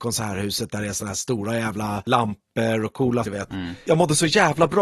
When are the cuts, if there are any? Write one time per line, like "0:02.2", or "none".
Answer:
0:03.2